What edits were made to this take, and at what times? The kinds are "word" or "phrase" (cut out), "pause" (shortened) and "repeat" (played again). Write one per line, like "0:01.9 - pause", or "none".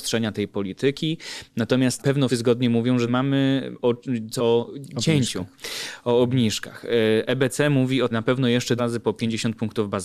0:02.0 - word
0:02.3 - word
0:03.1 - phrase
0:04.4 - word
0:08.1 - word
0:08.8 - phrase